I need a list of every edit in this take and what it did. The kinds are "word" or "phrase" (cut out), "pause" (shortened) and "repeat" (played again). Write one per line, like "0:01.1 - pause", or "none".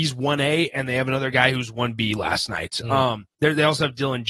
0:03.3 - pause